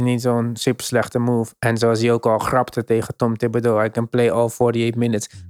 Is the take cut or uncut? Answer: uncut